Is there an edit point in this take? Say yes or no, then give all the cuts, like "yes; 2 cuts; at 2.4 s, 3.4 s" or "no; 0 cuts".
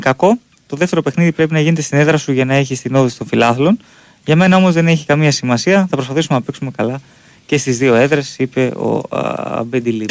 no; 0 cuts